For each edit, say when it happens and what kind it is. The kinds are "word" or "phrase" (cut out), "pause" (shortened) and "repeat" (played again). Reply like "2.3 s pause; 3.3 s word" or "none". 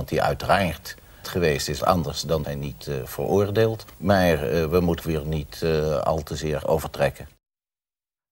1.2 s word; 1.8 s word; 2.4 s word; 3.9 s pause; 5.0 s phrase; 6.6 s word

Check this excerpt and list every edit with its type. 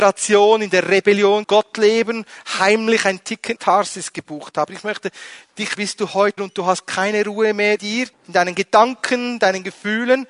1.4 s word; 3.6 s word; 5.8 s word; 6.4 s word; 7.8 s word; 8.1 s pause

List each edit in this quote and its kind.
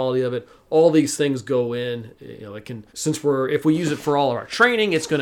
2.9 s pause

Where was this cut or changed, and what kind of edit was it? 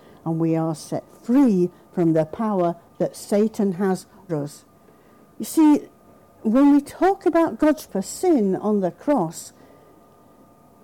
4.3 s word; 7.9 s word

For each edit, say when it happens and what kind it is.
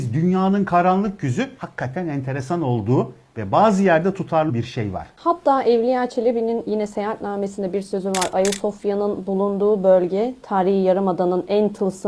4.5 s word

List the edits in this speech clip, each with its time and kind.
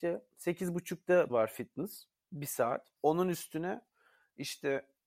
1.3 s phrase; 3.0 s pause

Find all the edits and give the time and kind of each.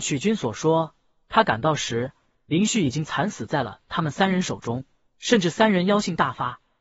none

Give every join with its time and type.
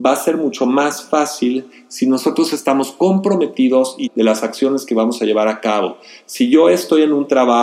4.0 s word

